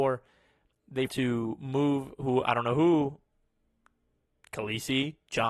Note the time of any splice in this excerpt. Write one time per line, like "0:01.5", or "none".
0:01.1